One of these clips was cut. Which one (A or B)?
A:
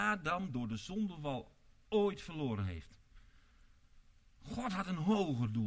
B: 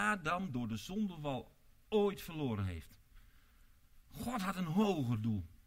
B